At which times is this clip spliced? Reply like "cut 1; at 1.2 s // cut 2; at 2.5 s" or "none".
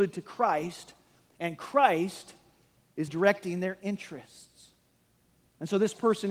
cut 1; at 3.1 s